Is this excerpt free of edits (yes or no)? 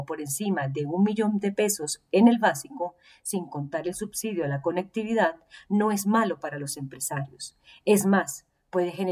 yes